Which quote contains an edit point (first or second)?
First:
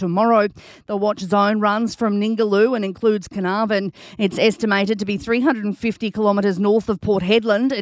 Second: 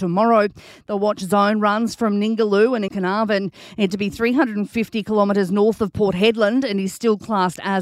second